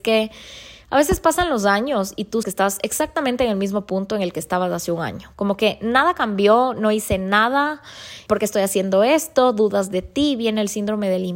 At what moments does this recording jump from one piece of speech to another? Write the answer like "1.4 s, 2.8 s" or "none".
2.4 s, 8.3 s